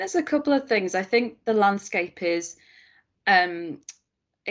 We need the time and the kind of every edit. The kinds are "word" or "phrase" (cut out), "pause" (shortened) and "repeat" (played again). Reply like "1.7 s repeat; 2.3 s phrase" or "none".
1.5 s phrase